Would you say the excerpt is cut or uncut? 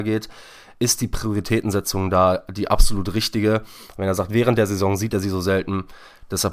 uncut